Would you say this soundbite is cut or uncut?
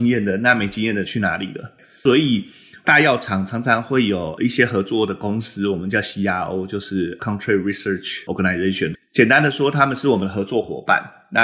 uncut